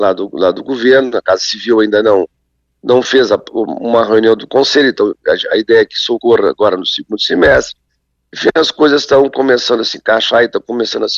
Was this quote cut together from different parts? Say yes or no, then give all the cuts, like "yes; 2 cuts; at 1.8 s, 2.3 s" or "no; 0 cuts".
no; 0 cuts